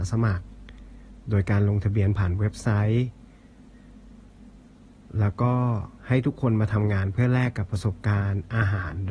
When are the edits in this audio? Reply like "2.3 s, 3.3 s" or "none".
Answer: 6.0 s